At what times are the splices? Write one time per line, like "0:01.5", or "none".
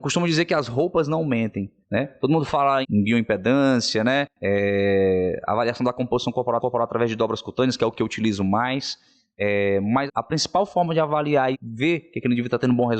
0:01.8
0:02.8
0:04.3
0:06.6
0:10.1
0:11.5